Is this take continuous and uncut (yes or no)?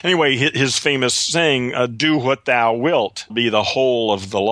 no